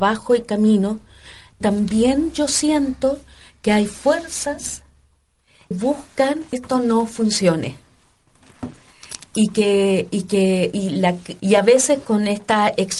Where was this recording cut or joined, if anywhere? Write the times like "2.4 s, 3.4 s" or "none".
1.6 s, 5.7 s, 6.5 s, 10.7 s, 11.4 s